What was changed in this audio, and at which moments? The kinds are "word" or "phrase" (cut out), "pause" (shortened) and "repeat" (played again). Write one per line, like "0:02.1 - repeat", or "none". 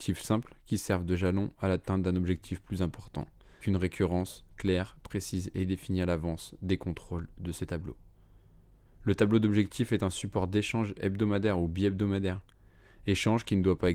0:03.6 - word